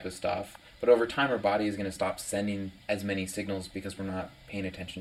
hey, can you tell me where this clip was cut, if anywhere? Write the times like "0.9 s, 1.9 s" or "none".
2.8 s